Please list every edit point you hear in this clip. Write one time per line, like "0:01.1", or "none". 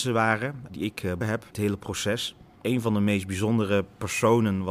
0:01.2
0:01.5